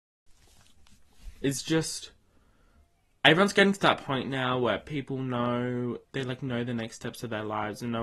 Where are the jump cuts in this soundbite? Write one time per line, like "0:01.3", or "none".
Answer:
0:06.0